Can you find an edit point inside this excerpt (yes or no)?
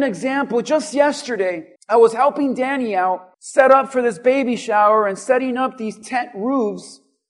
yes